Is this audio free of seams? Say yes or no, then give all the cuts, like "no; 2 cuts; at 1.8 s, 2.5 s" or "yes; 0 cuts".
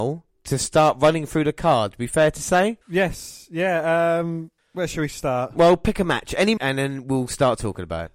no; 3 cuts; at 2.8 s, 4.6 s, 6.6 s